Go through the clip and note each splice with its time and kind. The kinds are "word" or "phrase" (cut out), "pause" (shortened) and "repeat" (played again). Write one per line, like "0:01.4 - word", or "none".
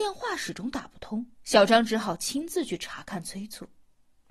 0:01.3 - pause

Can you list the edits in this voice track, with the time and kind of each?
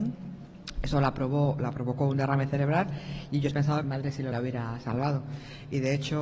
0:03.5 - word
0:03.8 - phrase
0:04.3 - word

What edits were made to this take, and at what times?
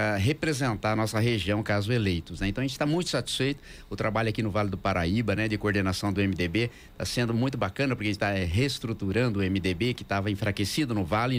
none

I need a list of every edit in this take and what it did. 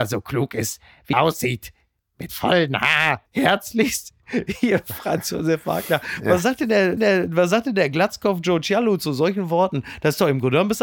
0:01.1 - word
0:02.3 - word
0:03.3 - pause
0:07.0 - repeat

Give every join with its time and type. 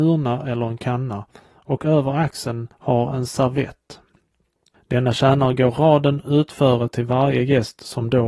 none

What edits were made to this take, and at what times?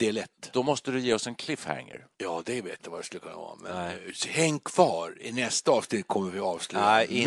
0:02.1 - pause
0:02.8 - word

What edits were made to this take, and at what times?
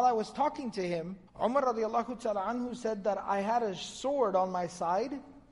0:01.3 - pause

